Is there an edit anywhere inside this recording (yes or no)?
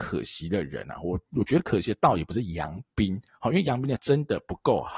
yes